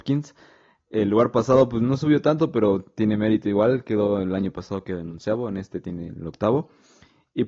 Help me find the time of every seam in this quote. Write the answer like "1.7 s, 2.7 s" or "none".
none